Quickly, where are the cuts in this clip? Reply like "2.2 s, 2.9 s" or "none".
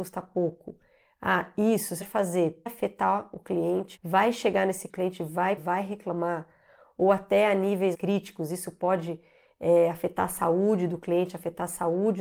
2.0 s, 2.7 s, 4.0 s, 4.9 s, 5.6 s, 7.9 s